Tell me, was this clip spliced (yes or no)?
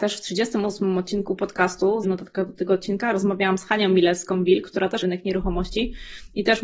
yes